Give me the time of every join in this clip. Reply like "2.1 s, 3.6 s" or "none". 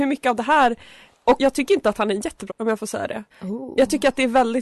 1.4 s, 2.5 s, 3.3 s